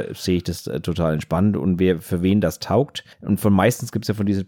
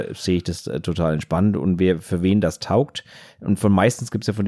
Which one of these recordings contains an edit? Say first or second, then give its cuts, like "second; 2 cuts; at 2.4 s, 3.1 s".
first; 1 cut; at 3.1 s